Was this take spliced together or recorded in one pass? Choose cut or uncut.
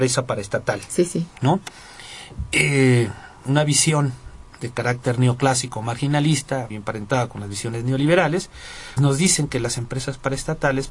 cut